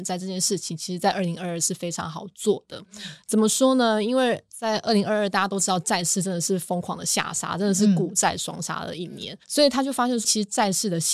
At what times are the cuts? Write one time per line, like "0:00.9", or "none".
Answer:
0:10.2